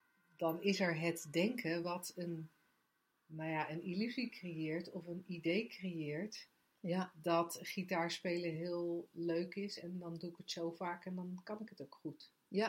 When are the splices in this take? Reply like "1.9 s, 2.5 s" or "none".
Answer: none